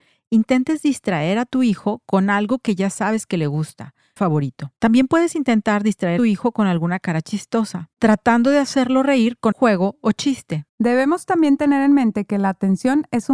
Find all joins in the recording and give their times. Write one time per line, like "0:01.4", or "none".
0:04.2
0:04.8
0:06.2
0:07.9
0:09.5
0:10.7